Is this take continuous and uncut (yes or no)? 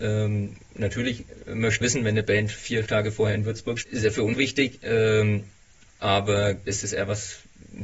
no